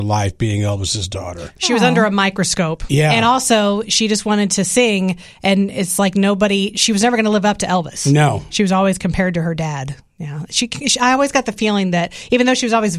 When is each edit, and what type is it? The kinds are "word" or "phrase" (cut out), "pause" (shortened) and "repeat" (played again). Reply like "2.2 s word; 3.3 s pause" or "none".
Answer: none